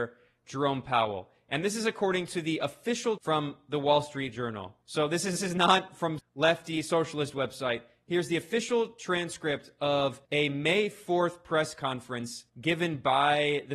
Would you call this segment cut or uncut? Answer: cut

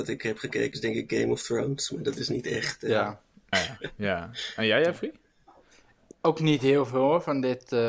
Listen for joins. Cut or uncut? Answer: cut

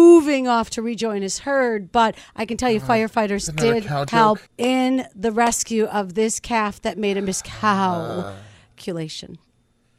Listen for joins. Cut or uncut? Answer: cut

